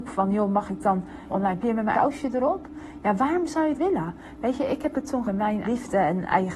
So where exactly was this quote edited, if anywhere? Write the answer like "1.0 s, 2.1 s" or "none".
1.3 s, 1.6 s, 1.9 s, 3.8 s, 5.2 s, 5.6 s